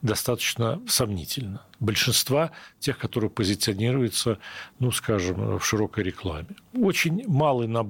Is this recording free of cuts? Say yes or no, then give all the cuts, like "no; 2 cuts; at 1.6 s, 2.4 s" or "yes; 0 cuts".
yes; 0 cuts